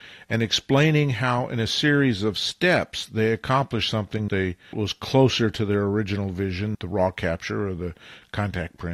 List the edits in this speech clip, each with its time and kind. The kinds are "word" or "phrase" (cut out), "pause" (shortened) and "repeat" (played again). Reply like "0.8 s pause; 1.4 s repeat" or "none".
4.3 s word; 4.7 s word; 6.7 s word